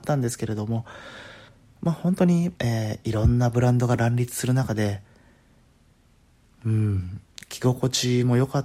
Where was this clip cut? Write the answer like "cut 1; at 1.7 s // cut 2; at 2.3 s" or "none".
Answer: cut 1; at 1.5 s // cut 2; at 2.6 s